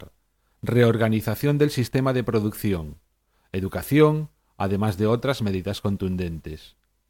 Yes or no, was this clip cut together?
no